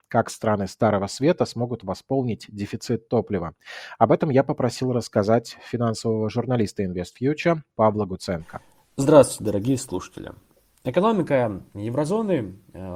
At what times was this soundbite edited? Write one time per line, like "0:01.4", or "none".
none